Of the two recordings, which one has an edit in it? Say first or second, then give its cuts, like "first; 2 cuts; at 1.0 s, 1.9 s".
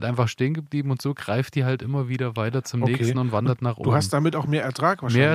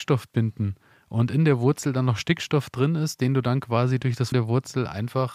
second; 1 cut; at 4.3 s